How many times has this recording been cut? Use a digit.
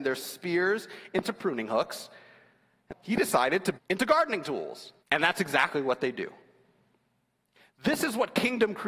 3